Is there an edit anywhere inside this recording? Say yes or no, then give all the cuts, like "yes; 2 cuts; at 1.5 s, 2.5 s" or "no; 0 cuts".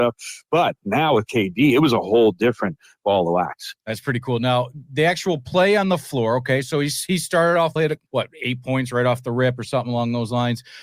yes; 3 cuts; at 3.8 s, 7.8 s, 8.1 s